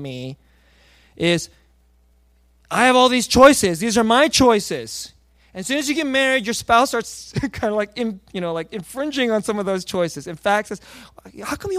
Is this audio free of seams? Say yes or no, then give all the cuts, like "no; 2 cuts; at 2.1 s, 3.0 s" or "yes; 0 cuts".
yes; 0 cuts